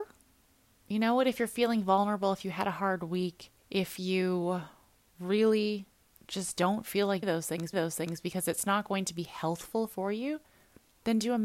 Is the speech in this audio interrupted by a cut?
yes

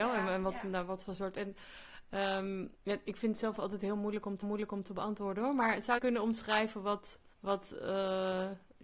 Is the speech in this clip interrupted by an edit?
yes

